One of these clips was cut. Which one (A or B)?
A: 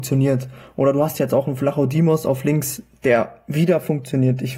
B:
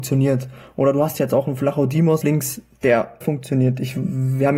B